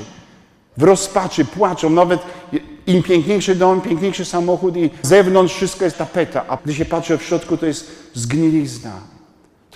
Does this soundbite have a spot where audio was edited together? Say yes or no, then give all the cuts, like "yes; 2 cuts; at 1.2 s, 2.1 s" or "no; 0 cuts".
yes; 3 cuts; at 5.0 s, 5.9 s, 6.6 s